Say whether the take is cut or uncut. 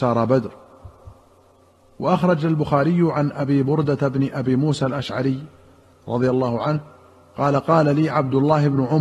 uncut